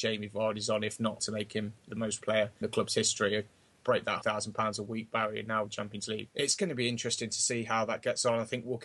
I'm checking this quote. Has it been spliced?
yes; 7 cuts; at 1.2 s, 1.9 s, 2.2 s, 2.6 s, 4.2 s, 5.7 s, 6.3 s

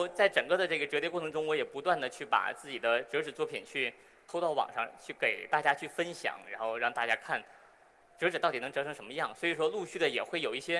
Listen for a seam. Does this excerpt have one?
no; 0 cuts

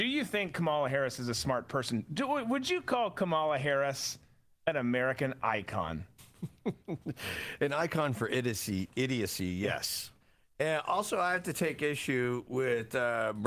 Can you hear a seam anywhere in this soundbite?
no; 0 cuts

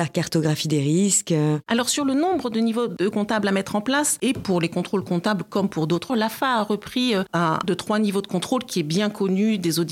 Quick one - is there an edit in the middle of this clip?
yes; 3 cuts; at 3.1 s, 6.1 s, 7.6 s

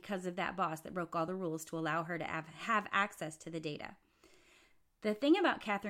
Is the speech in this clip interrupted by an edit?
no; 0 cuts

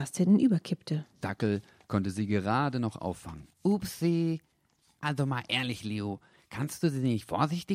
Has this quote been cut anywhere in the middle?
yes; 1 cut; at 3.5 s

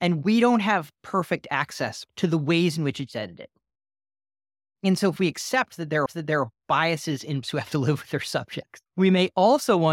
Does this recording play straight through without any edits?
no; 3 cuts; at 6.1 s, 7.4 s, 8.9 s

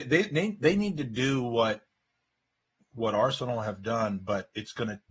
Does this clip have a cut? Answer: no; 0 cuts

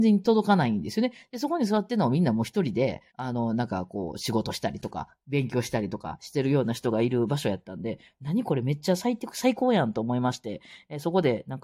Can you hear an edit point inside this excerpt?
yes; 1 cut; at 3.1 s

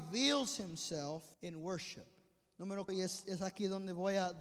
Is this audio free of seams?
no; 2 cuts; at 1.3 s, 2.9 s

